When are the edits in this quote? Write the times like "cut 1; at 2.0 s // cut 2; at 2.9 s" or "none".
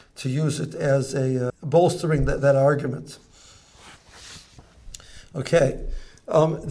cut 1; at 1.5 s